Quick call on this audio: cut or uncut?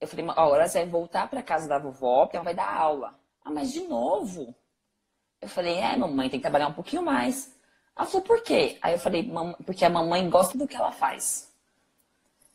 cut